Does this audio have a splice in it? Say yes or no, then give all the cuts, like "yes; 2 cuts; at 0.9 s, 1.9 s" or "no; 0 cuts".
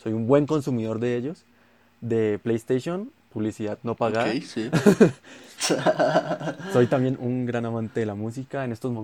no; 0 cuts